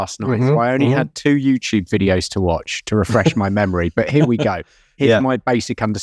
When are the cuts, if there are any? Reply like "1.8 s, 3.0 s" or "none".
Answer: none